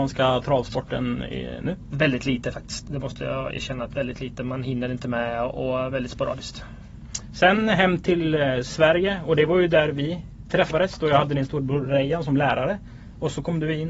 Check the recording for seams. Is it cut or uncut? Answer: uncut